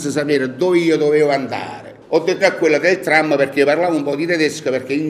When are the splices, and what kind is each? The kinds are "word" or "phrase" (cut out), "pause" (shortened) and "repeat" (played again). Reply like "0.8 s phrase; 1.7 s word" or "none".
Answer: 2.0 s pause; 2.4 s word